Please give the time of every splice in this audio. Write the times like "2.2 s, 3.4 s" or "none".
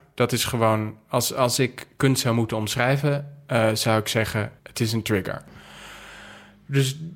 4.6 s